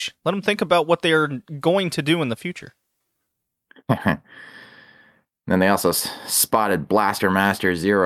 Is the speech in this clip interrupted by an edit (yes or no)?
no